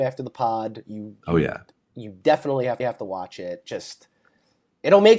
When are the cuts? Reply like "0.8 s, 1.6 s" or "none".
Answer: 2.8 s